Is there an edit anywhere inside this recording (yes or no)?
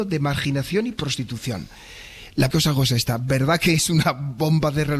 yes